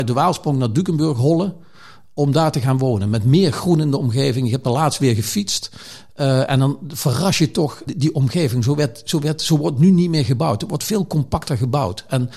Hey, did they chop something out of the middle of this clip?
yes; 1 cut; at 7.9 s

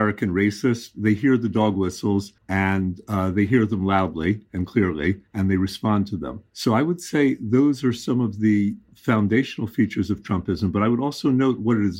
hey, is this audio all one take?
no; 3 cuts; at 2.4 s, 5.3 s, 6.5 s

